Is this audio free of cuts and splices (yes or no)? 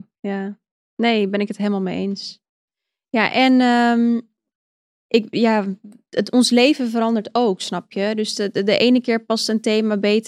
yes